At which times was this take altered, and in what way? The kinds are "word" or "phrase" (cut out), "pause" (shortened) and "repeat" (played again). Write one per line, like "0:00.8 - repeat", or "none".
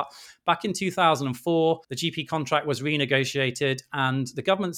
0:01.8 - pause